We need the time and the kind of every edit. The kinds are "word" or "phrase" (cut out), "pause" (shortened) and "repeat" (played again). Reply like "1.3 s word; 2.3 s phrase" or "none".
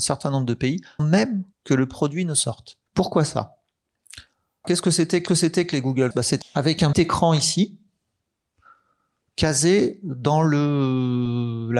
1.0 s word; 1.5 s pause; 2.9 s pause; 4.6 s word; 5.3 s repeat; 6.1 s word; 6.4 s phrase; 6.9 s word